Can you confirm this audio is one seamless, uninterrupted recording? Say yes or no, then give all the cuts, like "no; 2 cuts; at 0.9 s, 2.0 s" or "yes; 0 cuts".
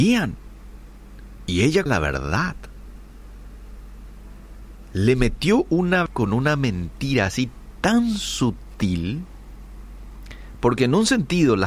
no; 2 cuts; at 1.9 s, 6.1 s